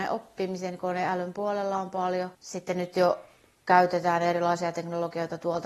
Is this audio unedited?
no; 1 cut; at 2.3 s

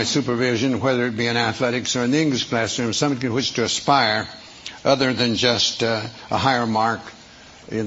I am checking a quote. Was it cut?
no; 0 cuts

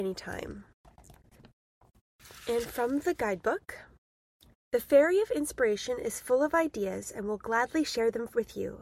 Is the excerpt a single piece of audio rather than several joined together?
yes; 0 cuts

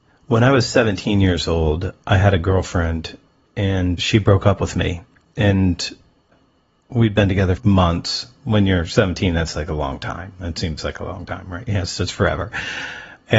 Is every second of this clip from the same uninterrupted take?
no; 1 cut; at 7.6 s

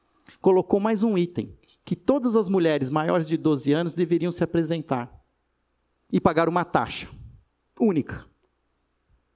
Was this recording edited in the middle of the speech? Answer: no; 0 cuts

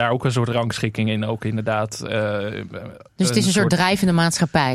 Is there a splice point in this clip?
no; 0 cuts

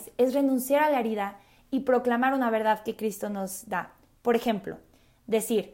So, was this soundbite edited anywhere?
no; 0 cuts

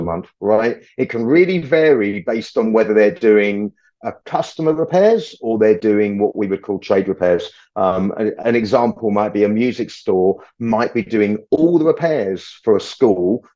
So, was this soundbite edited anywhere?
no; 0 cuts

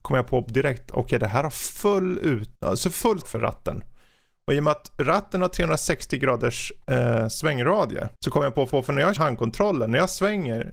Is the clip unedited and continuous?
no; 6 cuts; at 2.6 s, 3.2 s, 6.8 s, 8.2 s, 8.7 s, 9.2 s

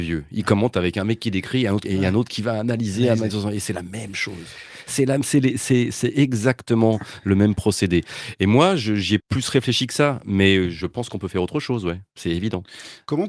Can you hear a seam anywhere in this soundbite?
yes; 2 cuts; at 1.8 s, 9.2 s

